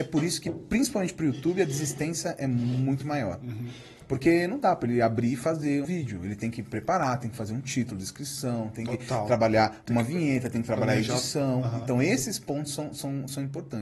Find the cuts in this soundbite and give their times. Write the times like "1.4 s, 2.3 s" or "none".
5.8 s